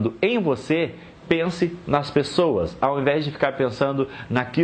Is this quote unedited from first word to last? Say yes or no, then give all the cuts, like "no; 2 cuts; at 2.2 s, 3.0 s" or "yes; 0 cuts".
yes; 0 cuts